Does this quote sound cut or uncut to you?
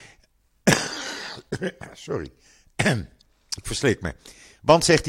uncut